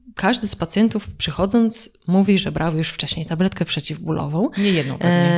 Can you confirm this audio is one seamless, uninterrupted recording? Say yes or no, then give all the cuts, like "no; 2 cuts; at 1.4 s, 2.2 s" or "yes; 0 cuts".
yes; 0 cuts